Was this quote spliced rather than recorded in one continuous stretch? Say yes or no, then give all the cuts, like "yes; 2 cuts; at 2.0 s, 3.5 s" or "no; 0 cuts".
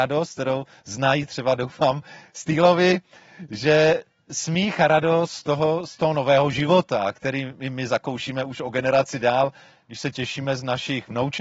no; 0 cuts